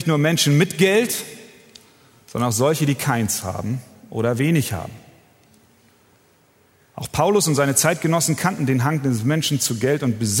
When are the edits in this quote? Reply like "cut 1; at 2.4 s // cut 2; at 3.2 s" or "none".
none